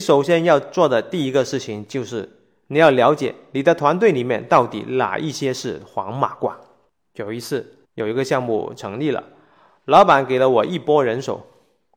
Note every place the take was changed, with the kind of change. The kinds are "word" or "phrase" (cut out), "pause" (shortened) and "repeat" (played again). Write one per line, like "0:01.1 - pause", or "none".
0:07.8 - pause